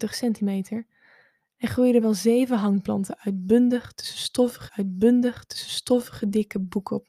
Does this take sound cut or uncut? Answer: cut